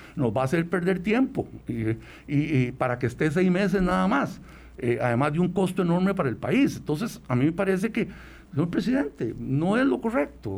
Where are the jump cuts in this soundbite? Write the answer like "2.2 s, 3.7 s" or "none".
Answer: none